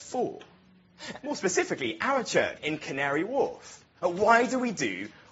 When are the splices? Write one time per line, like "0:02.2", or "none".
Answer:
0:01.2
0:02.6